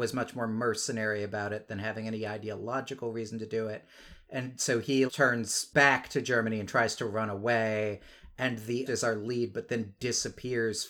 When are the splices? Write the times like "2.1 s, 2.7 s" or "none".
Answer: 5.1 s, 8.9 s